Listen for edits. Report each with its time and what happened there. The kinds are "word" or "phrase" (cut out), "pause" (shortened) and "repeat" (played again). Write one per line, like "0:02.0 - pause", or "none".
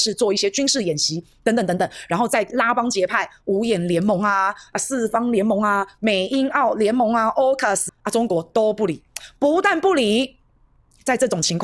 0:07.9 - word